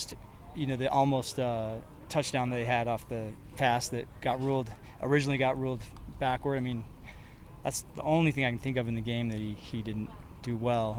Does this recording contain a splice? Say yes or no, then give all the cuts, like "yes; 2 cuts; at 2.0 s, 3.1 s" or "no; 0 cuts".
no; 0 cuts